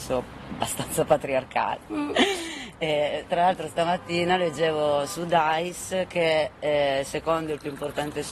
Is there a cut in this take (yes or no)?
no